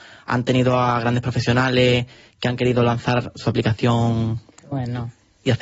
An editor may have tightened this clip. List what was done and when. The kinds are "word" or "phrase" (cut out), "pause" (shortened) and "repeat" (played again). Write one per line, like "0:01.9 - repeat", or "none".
none